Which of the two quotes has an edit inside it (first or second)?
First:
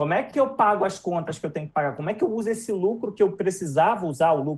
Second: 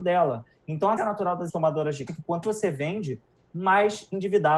second